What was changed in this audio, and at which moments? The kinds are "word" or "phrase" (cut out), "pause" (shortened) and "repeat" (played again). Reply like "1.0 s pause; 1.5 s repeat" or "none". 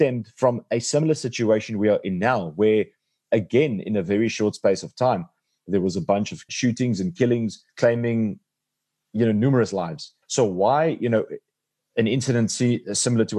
6.5 s word; 7.7 s pause; 10.2 s pause

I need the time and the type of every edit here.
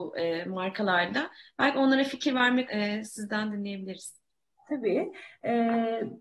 2.7 s word

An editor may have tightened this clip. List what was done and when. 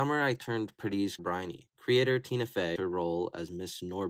1.2 s word; 1.7 s pause; 2.8 s word

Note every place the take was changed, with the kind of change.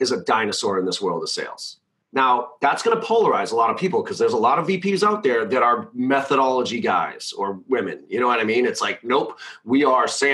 none

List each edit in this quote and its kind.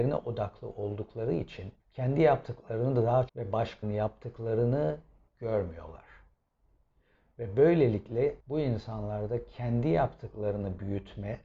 1.8 s pause; 3.3 s phrase; 3.8 s word; 8.4 s pause

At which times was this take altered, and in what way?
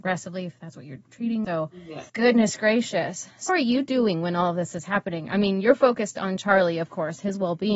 2.1 s pause; 3.5 s word

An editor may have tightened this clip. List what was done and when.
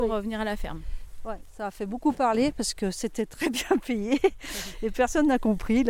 none

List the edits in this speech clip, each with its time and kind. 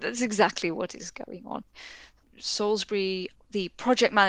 none

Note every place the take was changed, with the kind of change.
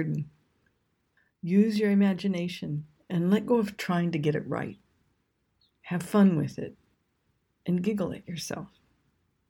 none

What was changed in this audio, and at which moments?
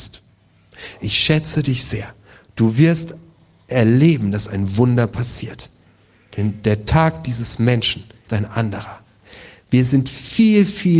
8.3 s word

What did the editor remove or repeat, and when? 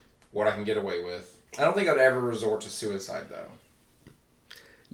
1.5 s pause

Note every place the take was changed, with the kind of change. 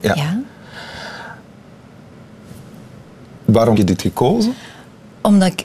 3.7 s word

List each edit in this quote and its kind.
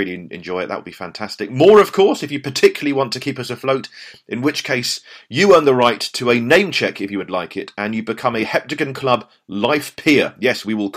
none

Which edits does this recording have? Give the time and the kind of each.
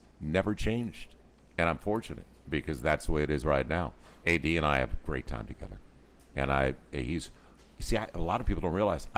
none

